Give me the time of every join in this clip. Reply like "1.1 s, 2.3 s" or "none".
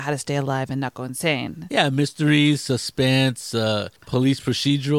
4.0 s